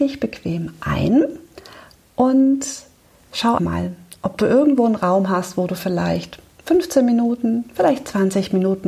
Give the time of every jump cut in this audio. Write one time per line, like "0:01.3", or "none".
0:03.6